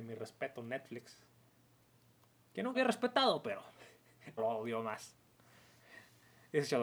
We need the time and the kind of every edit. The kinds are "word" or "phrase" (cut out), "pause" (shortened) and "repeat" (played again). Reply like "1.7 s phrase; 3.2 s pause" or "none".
2.7 s word; 4.4 s word

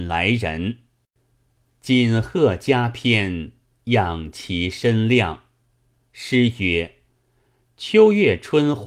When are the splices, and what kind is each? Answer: none

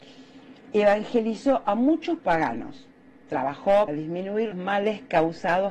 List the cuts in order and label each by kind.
2.2 s word; 3.9 s word; 4.5 s word

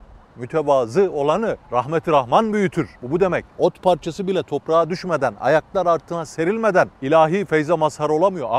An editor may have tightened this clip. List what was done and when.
1.6 s pause; 3.0 s pause; 3.5 s pause; 6.9 s pause

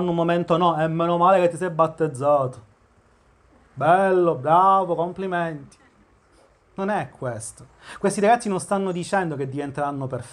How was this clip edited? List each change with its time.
none

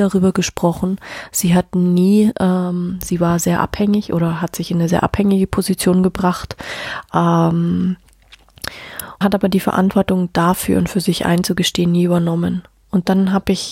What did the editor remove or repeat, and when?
4.9 s word; 9.2 s word

